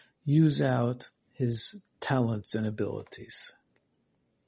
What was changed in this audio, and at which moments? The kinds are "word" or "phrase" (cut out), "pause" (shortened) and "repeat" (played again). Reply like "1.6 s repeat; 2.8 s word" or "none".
1.2 s pause